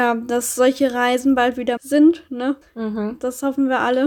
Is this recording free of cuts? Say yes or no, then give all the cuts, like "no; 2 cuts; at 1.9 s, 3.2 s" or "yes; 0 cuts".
no; 2 cuts; at 1.8 s, 2.6 s